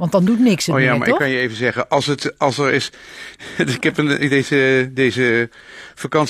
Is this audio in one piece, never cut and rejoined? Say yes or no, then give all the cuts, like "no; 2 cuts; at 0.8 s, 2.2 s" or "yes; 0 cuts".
yes; 0 cuts